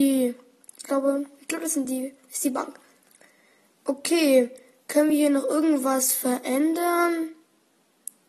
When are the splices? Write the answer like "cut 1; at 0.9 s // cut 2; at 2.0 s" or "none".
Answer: none